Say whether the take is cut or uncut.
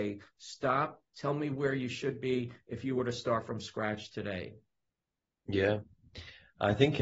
cut